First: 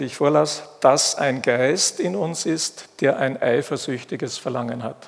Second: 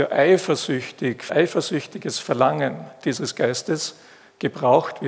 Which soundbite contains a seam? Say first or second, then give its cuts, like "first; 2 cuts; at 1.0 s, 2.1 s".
second; 1 cut; at 1.3 s